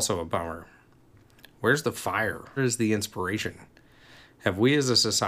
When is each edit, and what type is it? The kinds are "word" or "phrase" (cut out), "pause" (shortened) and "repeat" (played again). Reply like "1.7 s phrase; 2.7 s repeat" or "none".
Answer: 2.6 s word